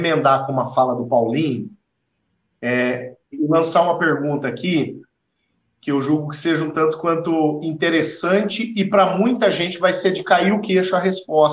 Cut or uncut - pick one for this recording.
cut